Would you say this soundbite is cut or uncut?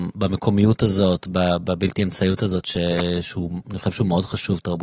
uncut